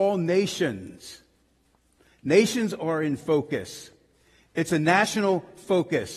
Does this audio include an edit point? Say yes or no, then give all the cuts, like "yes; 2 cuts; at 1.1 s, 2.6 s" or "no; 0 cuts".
no; 0 cuts